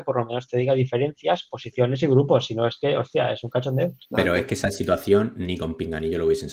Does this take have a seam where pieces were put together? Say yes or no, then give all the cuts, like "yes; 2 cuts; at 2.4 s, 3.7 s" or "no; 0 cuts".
yes; 1 cut; at 4.0 s